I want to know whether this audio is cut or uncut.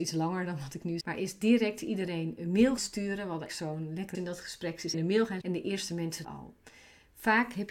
cut